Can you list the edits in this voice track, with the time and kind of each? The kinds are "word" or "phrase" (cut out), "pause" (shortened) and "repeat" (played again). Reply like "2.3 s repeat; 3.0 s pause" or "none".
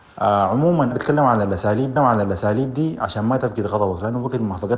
0.9 s word; 2.0 s repeat